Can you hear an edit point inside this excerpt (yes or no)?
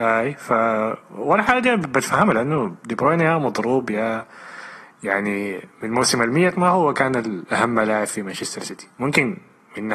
yes